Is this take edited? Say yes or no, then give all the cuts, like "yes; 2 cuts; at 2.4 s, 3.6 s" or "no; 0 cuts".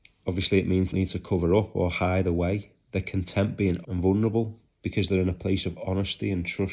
yes; 2 cuts; at 0.9 s, 3.8 s